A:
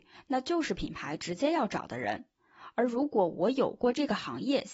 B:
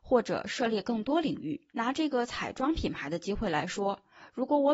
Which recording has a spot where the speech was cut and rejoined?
B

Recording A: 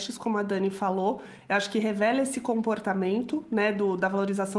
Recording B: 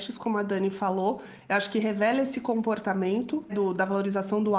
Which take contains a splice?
B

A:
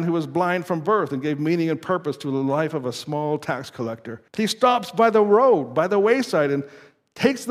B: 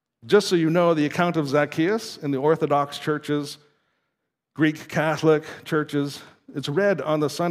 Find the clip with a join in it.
A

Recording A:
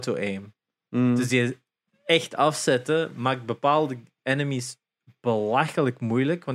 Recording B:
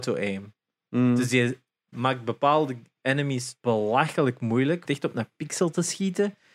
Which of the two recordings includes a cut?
B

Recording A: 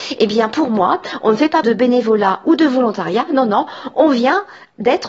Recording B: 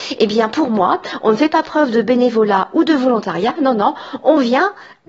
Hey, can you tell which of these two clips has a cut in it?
A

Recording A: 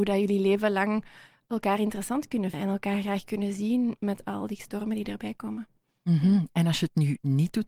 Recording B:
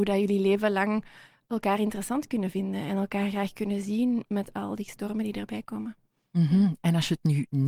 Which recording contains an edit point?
A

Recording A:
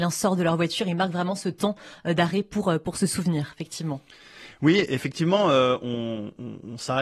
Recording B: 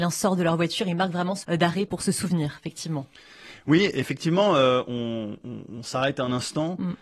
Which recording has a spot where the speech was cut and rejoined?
B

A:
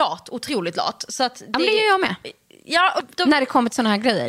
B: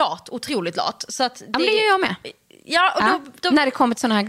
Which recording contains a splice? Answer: A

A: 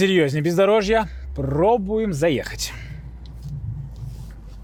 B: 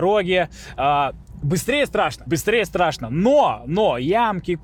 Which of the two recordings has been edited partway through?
B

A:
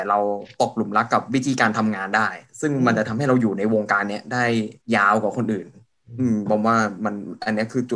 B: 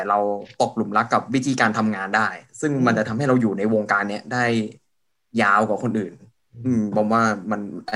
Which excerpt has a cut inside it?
A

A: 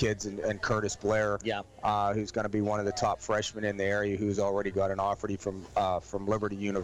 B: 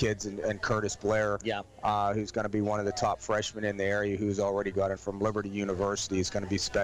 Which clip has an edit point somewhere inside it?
B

